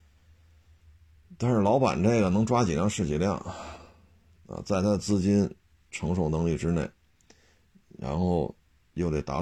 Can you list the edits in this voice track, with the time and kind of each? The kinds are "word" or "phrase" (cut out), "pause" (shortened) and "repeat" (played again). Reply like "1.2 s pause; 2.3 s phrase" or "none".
none